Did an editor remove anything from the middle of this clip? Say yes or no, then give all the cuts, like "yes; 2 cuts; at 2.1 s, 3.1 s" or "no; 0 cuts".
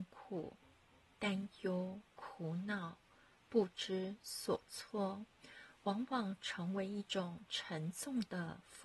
yes; 1 cut; at 2.1 s